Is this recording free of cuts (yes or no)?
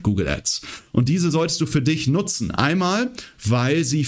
yes